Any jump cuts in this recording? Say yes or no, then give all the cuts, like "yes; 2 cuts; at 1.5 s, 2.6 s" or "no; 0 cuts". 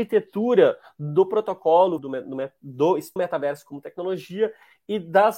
yes; 2 cuts; at 2.0 s, 3.2 s